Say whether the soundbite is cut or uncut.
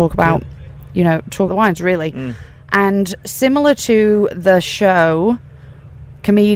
cut